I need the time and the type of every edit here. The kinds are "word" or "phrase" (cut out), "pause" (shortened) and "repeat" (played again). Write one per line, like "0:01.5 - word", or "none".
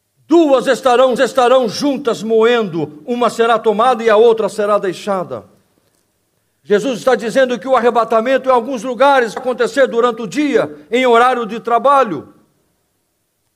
0:01.2 - repeat
0:09.4 - word